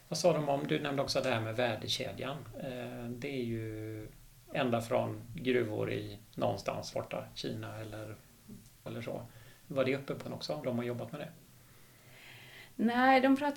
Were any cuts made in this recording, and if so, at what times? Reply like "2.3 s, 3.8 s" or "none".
4.5 s, 6.9 s, 8.9 s, 10.2 s, 10.6 s